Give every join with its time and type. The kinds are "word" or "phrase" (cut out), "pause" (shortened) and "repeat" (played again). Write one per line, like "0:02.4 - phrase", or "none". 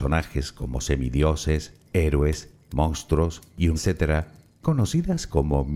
0:03.8 - word